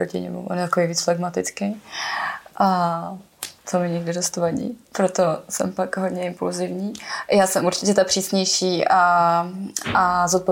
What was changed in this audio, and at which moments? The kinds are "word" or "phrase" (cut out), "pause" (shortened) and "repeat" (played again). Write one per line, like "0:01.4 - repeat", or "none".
0:03.6 - pause
0:04.9 - pause